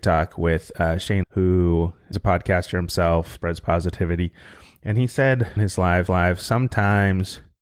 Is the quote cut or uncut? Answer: cut